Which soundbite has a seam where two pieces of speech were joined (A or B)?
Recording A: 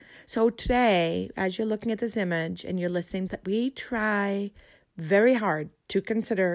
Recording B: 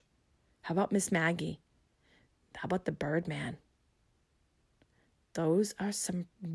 A